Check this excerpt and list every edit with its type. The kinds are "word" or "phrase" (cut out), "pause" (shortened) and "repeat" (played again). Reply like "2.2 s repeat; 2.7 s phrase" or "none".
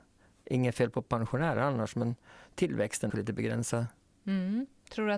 3.1 s phrase